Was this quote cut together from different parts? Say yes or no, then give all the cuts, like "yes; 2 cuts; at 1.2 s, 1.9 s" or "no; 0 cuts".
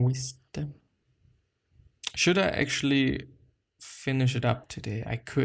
no; 0 cuts